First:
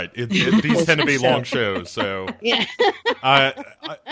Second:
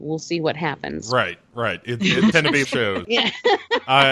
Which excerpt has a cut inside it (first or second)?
second